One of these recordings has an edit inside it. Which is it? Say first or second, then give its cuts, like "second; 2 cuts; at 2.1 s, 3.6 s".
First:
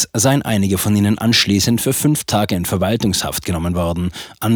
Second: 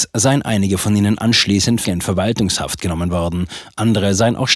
second; 1 cut; at 1.8 s